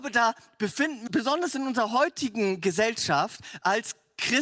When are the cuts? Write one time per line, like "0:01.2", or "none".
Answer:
0:01.1